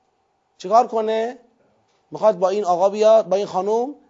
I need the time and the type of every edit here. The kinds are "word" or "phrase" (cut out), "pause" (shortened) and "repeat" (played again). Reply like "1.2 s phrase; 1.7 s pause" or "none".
none